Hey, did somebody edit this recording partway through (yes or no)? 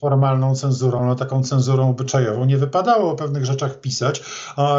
no